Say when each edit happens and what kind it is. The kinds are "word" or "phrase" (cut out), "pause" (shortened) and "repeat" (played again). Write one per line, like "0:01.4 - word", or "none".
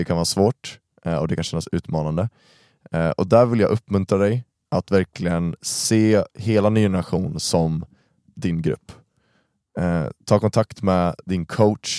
0:10.2 - pause